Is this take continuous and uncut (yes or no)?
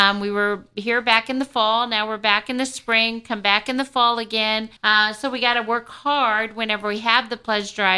no